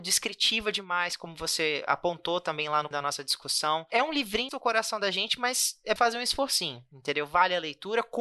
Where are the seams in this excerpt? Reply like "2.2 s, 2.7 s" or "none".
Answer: 2.9 s, 4.5 s, 6.0 s